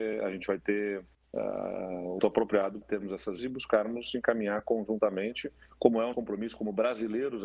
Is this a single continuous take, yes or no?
no